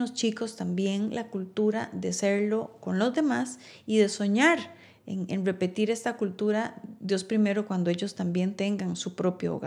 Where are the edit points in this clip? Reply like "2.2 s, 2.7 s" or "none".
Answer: none

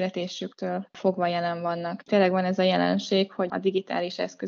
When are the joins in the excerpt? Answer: 3.5 s

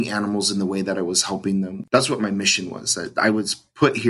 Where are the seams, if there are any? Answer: none

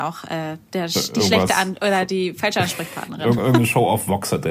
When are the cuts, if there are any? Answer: none

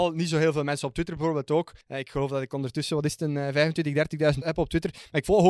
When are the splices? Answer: 1.8 s, 4.4 s

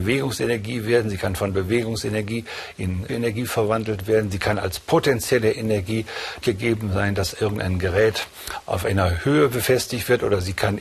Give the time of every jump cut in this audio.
3.1 s, 6.4 s

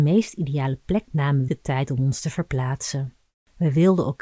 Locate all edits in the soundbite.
1.0 s, 1.5 s

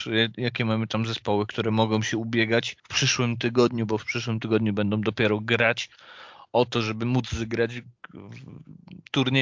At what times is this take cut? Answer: 2.8 s

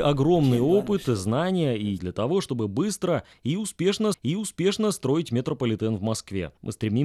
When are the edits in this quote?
2.0 s, 4.1 s

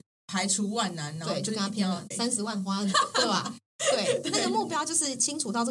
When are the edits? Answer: 2.1 s, 2.9 s

